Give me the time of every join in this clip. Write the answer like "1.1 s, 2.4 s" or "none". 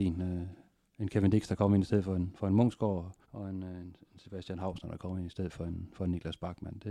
3.2 s